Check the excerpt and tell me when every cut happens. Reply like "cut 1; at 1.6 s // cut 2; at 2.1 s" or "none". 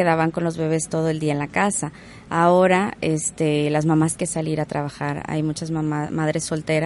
cut 1; at 4.2 s